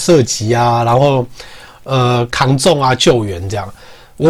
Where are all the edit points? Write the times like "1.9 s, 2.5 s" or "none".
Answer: none